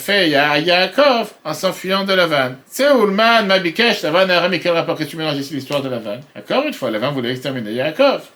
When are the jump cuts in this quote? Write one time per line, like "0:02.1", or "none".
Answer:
0:01.4
0:02.6
0:06.3